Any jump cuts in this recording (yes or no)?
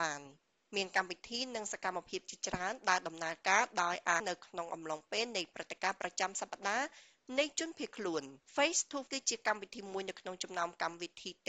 yes